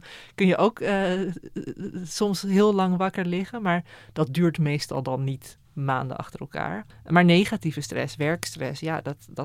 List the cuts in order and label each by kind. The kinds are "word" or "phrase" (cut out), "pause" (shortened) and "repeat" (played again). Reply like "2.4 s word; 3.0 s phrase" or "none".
5.6 s pause; 6.9 s pause